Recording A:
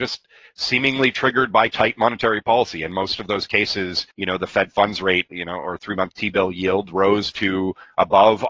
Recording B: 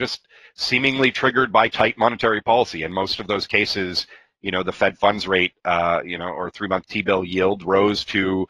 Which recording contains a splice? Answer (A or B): A